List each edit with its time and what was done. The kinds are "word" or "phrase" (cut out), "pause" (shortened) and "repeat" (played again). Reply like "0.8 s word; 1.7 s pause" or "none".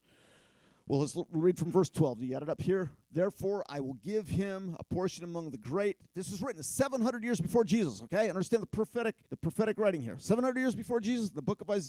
3.0 s pause; 9.3 s pause